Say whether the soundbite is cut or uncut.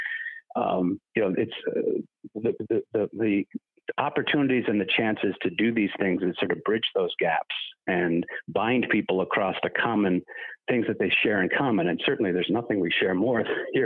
uncut